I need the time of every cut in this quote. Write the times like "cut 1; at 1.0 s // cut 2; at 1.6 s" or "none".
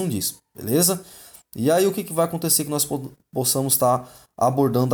none